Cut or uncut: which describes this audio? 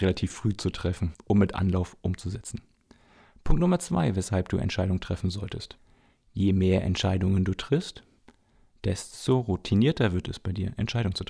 uncut